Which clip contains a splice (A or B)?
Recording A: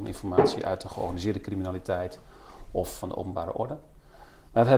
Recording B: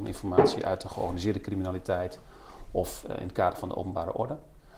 A